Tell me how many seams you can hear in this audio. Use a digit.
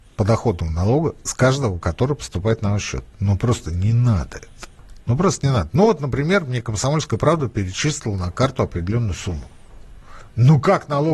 2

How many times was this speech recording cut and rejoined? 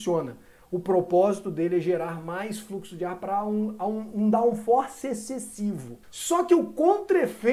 1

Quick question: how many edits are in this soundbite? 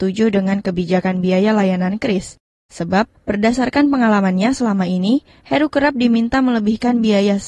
0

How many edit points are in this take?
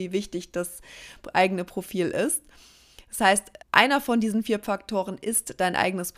1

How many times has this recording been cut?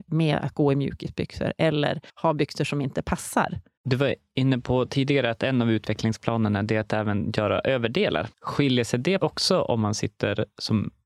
4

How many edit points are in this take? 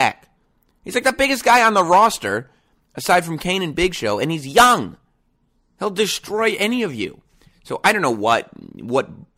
0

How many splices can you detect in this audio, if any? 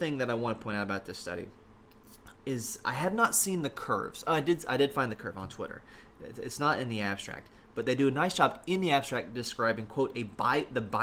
1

